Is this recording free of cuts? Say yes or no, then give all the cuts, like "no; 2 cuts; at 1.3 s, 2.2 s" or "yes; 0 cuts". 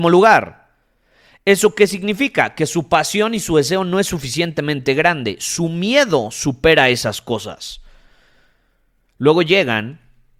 yes; 0 cuts